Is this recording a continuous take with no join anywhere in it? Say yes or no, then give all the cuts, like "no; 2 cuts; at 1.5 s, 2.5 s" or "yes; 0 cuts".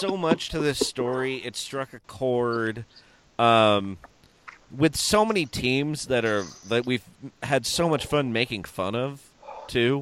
yes; 0 cuts